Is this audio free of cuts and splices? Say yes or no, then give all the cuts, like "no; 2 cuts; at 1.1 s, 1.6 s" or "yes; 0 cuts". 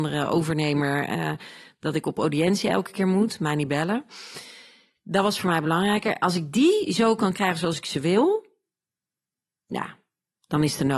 yes; 0 cuts